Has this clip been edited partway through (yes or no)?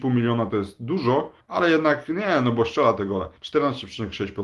yes